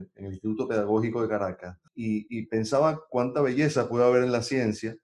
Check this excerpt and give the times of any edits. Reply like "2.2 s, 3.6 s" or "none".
1.9 s, 3.1 s